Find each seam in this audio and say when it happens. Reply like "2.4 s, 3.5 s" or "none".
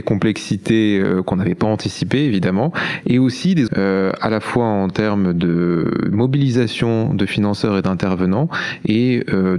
3.7 s